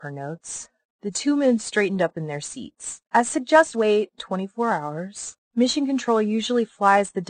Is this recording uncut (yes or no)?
no